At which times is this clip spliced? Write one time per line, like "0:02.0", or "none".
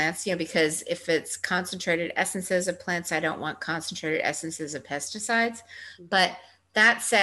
none